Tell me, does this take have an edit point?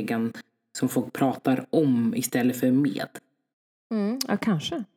yes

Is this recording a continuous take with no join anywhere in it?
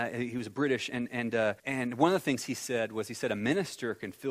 no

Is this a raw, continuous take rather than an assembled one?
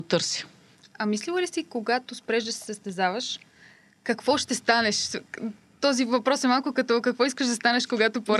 yes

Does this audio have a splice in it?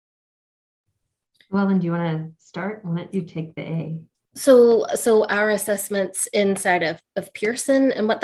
no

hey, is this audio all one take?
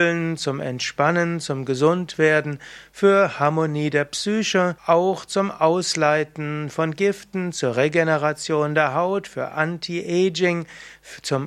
no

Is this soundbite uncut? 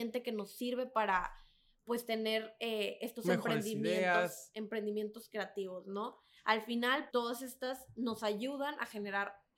no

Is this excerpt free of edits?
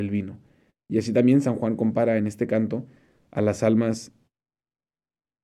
yes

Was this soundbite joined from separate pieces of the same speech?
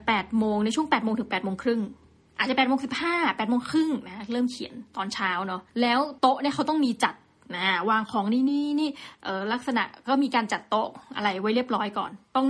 yes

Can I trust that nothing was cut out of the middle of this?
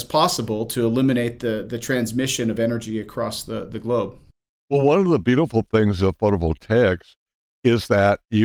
yes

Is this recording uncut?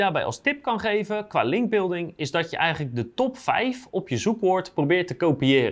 yes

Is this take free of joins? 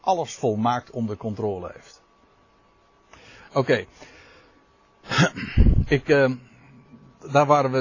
no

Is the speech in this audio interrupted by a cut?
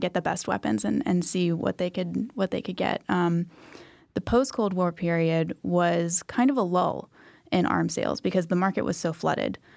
no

